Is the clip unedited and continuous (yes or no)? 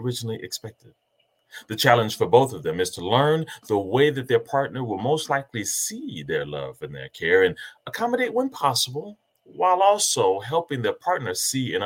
yes